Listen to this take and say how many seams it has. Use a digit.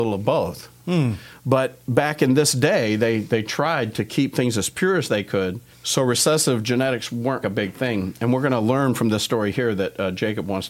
2